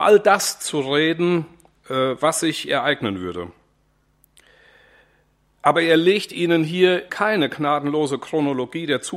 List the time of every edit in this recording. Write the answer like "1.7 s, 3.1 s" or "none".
7.1 s